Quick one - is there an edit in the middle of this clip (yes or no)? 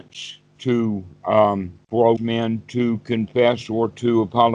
yes